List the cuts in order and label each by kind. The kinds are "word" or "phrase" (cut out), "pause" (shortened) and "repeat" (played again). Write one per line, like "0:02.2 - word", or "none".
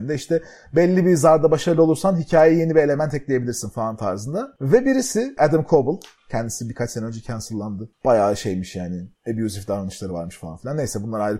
none